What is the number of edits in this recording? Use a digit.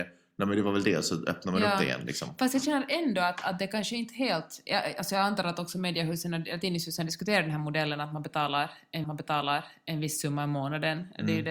1